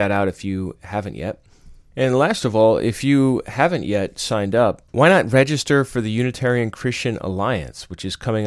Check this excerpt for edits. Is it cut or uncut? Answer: uncut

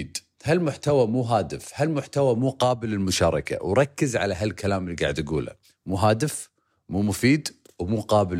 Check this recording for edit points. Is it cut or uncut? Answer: uncut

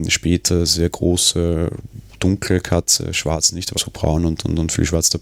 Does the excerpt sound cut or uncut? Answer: cut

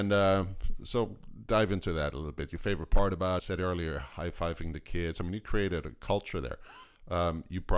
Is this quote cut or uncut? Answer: cut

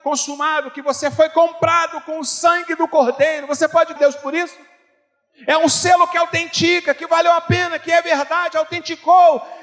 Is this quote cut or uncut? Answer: cut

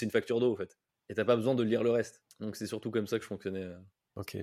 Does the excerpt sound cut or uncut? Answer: uncut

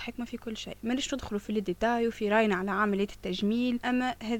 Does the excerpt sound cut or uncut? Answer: uncut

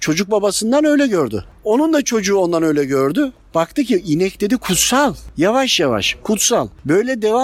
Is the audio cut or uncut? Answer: uncut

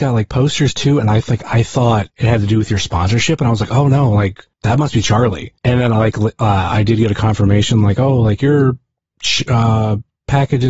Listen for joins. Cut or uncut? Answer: cut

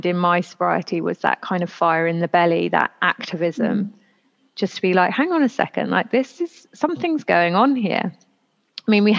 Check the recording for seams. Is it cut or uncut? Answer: uncut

